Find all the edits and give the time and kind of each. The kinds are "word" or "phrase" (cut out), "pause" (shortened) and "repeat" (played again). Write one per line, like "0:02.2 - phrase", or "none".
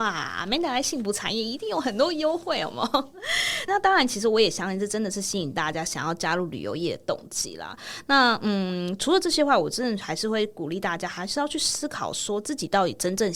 0:03.7 - word